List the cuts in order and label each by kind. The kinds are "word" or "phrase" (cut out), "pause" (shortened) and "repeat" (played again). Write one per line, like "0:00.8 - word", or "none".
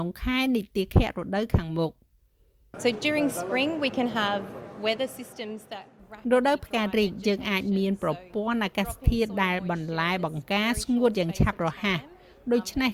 none